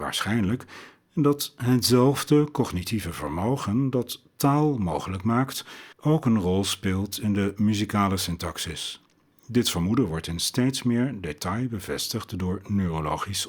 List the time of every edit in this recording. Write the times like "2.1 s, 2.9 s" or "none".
5.9 s